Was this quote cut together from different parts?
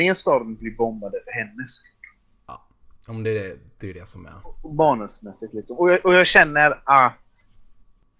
no; 0 cuts

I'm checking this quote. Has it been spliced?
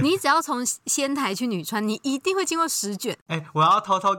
no; 0 cuts

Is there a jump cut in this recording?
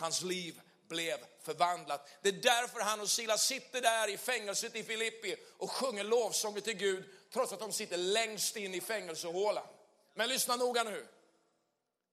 no; 0 cuts

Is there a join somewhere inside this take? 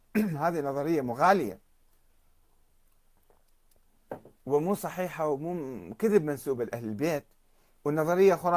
yes; 1 cut; at 4.4 s

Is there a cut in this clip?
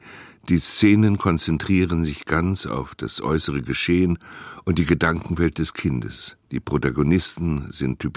yes; 1 cut; at 6.4 s

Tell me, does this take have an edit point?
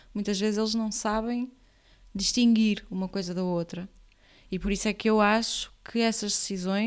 no; 0 cuts

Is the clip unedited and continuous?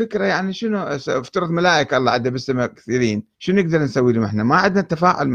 no; 1 cut; at 3.3 s

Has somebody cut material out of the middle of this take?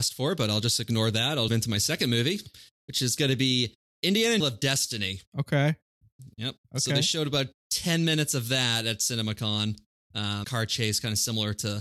yes; 5 cuts; at 1.5 s, 4.4 s, 5.3 s, 6.6 s, 10.4 s

